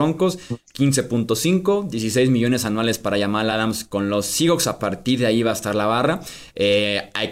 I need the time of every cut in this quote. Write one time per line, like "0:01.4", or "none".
none